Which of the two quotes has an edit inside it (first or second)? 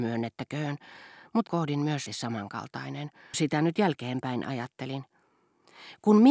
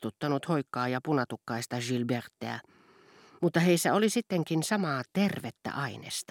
first